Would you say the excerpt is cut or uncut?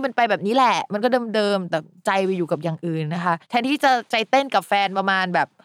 cut